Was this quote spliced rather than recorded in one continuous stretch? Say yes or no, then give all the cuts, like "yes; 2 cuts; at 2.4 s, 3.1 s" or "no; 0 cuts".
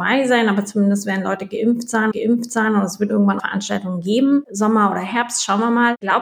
yes; 3 cuts; at 2.1 s, 3.1 s, 3.4 s